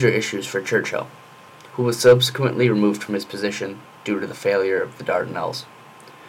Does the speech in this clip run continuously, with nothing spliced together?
yes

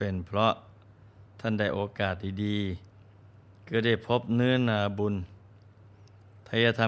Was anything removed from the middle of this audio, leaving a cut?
yes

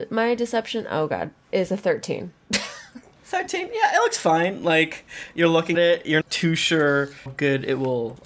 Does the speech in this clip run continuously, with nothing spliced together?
no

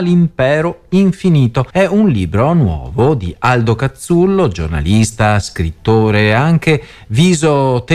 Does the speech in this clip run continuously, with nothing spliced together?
no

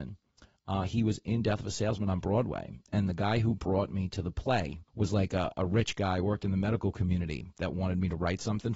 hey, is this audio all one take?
no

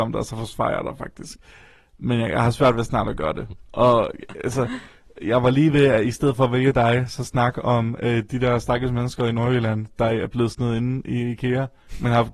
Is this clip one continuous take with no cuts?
yes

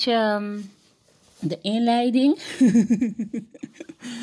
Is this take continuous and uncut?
yes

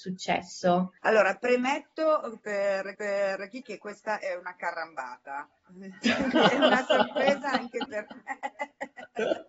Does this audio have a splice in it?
yes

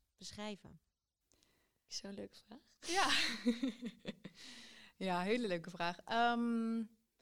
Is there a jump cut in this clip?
no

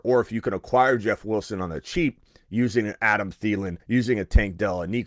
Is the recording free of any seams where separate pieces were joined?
no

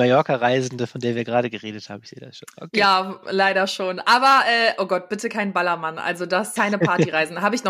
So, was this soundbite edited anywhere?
yes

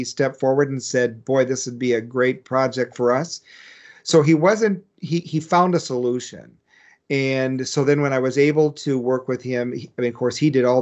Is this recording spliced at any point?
no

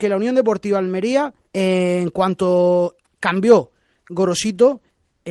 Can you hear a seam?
yes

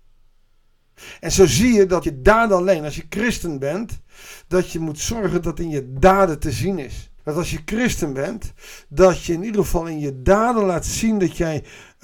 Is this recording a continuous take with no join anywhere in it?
no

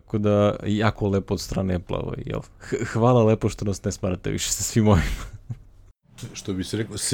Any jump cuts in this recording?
no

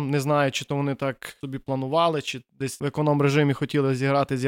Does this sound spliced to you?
no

